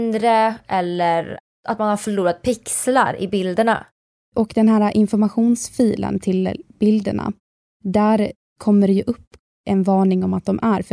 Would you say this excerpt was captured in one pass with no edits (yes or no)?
yes